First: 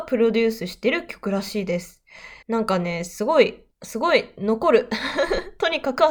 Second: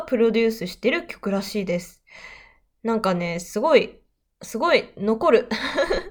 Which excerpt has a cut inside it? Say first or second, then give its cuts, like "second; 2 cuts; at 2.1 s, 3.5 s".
first; 2 cuts; at 2.4 s, 3.7 s